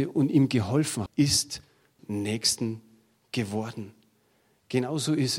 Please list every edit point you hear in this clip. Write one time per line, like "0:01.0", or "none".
0:01.1
0:02.0